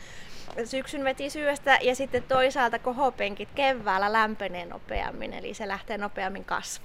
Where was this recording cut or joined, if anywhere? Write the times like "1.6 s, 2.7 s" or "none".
none